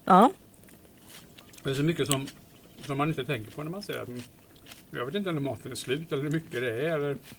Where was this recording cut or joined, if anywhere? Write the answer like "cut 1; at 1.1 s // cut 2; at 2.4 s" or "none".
none